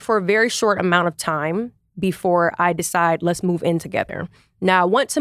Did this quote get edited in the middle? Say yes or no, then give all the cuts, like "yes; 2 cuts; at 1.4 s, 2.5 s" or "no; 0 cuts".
no; 0 cuts